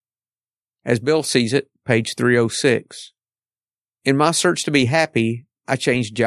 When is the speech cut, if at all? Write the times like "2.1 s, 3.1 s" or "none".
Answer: none